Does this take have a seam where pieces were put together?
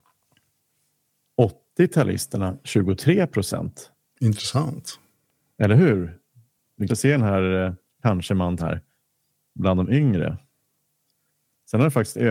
yes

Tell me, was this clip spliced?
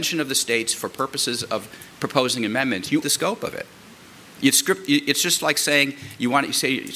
yes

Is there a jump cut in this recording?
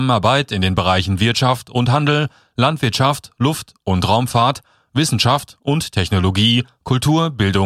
no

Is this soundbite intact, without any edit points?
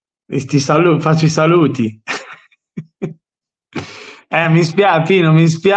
yes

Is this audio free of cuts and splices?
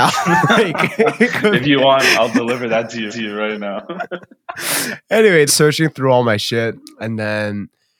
no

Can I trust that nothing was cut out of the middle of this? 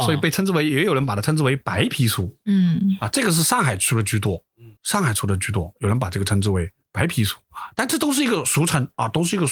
no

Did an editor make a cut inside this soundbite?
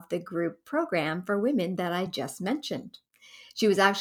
no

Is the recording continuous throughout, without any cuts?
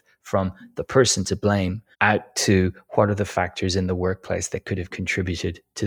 no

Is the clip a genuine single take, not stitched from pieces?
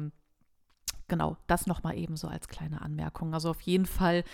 yes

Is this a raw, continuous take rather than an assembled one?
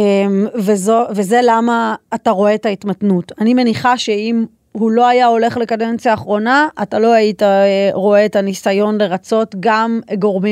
yes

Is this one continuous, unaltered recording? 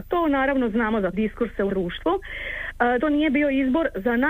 no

